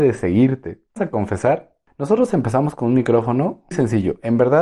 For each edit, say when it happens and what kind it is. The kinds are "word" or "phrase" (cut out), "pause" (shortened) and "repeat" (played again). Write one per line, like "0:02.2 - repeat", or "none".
0:01.0 - word
0:03.7 - word